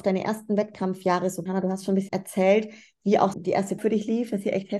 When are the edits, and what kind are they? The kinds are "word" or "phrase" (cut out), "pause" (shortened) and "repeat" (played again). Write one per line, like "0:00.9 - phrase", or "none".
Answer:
0:01.5 - word
0:02.1 - word
0:03.3 - word
0:03.8 - word